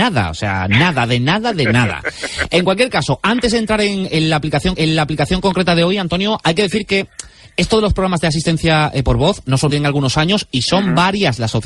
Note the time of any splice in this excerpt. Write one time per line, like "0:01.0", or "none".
0:04.8
0:09.7